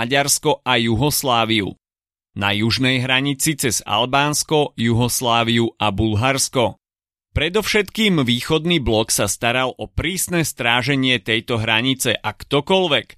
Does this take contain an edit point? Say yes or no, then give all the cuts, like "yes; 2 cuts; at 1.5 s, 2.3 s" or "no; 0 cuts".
no; 0 cuts